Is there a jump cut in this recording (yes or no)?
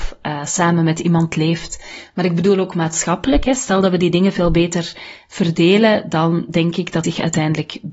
yes